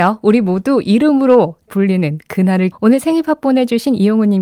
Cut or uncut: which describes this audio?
cut